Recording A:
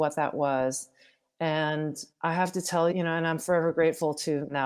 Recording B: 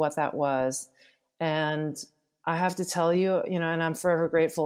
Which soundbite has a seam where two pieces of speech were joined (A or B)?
A